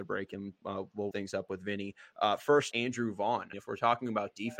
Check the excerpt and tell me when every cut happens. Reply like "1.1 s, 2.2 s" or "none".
1.1 s, 2.7 s, 3.5 s

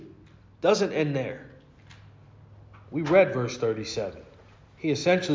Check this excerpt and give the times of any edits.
none

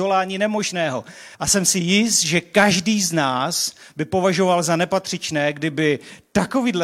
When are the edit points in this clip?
1.3 s

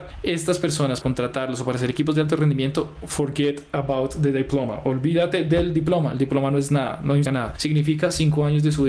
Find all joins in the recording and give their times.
1.0 s, 7.2 s

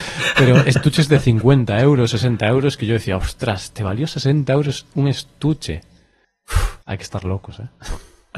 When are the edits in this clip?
6.8 s

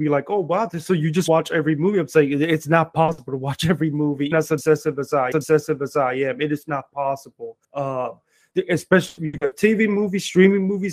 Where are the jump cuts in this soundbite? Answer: 4.3 s, 5.3 s, 7.6 s

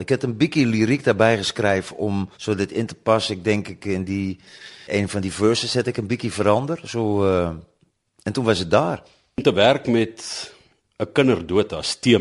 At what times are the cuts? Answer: 2.3 s

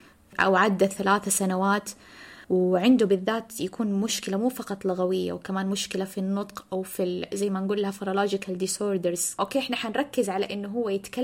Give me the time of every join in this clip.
2.4 s

